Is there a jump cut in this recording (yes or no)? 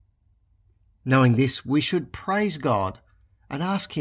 no